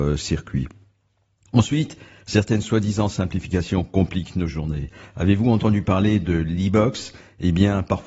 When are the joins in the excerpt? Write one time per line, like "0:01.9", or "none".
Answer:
none